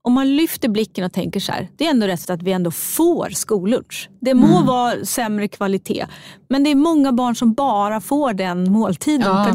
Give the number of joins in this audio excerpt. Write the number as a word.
one